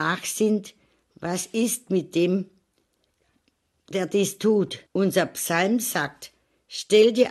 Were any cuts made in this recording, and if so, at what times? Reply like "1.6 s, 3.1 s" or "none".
4.9 s